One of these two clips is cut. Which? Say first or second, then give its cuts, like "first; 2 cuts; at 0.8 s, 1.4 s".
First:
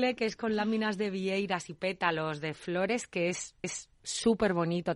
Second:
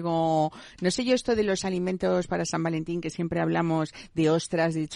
first; 1 cut; at 3.6 s